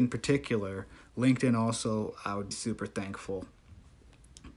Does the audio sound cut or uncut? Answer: cut